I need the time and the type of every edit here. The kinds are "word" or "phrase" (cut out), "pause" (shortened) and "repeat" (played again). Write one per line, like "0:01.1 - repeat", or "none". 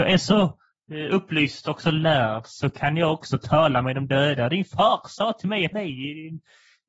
0:05.7 - phrase